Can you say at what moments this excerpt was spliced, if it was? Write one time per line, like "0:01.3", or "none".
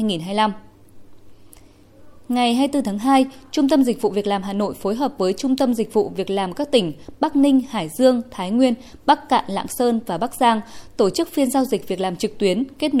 none

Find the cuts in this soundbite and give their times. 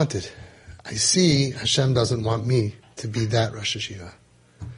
none

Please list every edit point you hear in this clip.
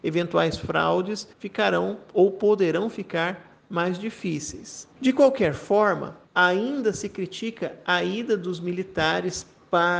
0:01.3
0:04.9
0:06.2

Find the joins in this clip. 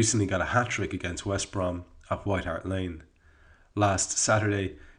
none

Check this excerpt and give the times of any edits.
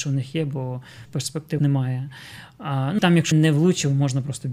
0:01.1
0:01.6
0:03.0
0:03.3

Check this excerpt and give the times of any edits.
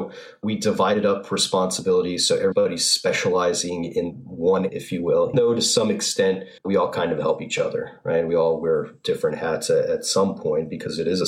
0:04.7
0:05.3
0:06.6

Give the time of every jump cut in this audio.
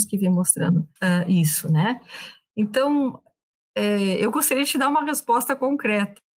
0:01.0

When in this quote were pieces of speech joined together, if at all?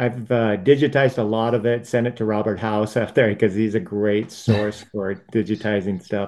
none

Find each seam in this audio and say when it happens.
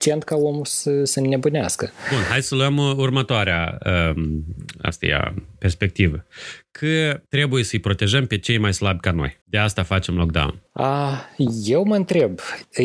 0:07.3
0:09.4
0:10.7

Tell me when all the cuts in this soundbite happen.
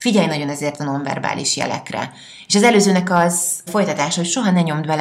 0:03.7

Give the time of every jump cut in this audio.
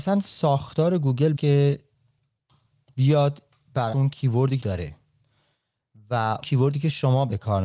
0:01.4
0:03.9
0:04.6
0:06.4

